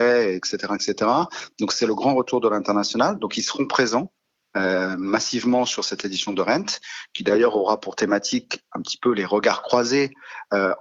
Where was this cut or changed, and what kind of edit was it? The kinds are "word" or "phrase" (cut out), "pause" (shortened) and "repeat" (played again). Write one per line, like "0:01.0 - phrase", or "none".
none